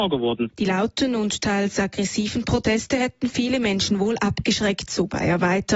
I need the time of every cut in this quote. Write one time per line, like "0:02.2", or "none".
none